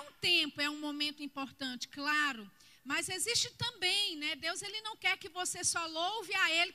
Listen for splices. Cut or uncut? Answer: uncut